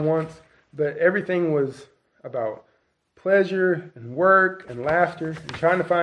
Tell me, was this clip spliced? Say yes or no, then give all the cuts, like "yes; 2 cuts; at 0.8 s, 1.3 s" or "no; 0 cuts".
no; 0 cuts